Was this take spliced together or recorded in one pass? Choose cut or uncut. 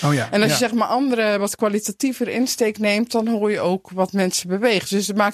uncut